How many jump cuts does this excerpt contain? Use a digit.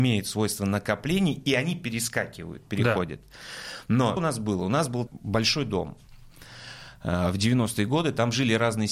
2